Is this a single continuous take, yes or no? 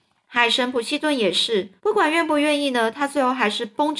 no